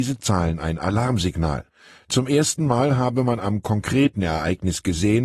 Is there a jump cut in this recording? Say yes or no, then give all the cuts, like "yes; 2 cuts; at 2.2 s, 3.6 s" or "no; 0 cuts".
no; 0 cuts